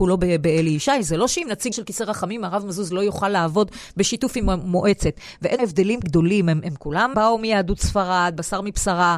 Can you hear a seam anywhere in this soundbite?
yes; 4 cuts; at 1.7 s, 5.6 s, 6.0 s, 7.1 s

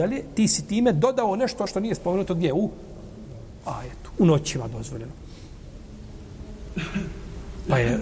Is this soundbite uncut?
no; 1 cut; at 1.7 s

